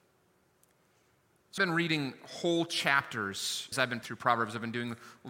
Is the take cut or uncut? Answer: cut